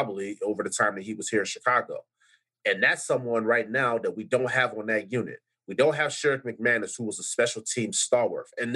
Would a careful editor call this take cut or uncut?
uncut